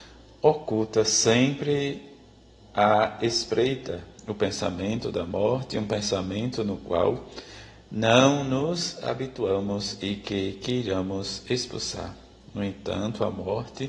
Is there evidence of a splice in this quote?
no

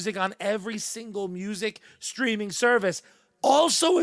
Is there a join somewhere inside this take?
no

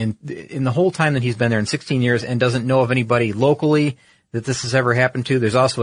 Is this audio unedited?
yes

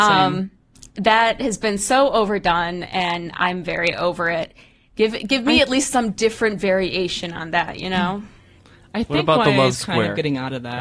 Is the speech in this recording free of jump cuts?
yes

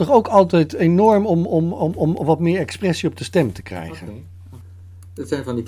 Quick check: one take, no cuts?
yes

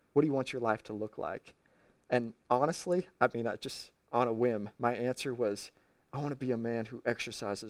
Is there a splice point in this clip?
no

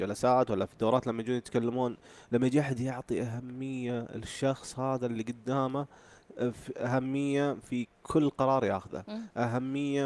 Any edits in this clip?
no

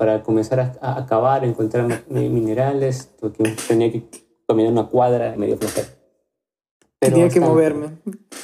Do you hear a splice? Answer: yes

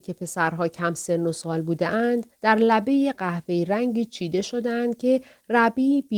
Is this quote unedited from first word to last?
no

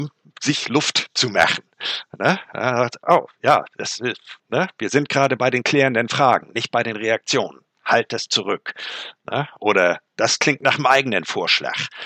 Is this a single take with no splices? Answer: no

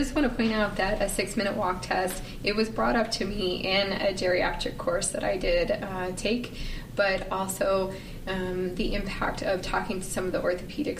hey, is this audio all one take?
yes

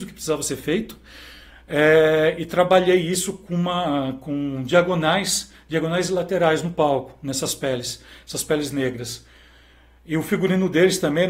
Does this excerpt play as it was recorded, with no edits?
yes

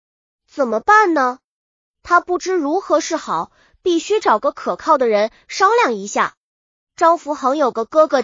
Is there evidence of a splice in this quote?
no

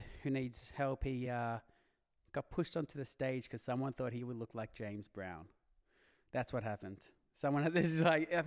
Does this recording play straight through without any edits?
yes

